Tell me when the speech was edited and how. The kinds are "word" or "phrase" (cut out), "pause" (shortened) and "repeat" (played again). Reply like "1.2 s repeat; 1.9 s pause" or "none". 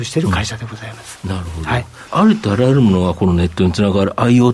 2.1 s word

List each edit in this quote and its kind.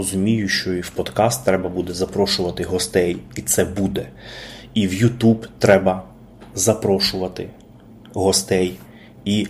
none

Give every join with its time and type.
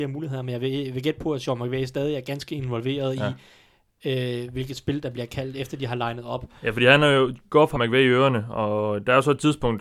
7.8 s word

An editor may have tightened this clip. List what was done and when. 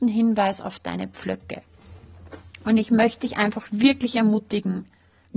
none

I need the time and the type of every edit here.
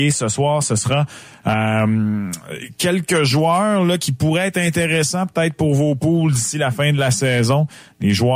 none

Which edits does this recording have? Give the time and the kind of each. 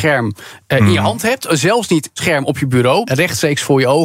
2.2 s phrase; 3.0 s word

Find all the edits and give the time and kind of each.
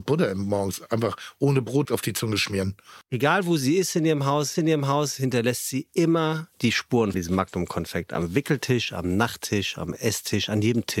1.8 s word; 4.5 s repeat; 6.5 s pause; 7.1 s word

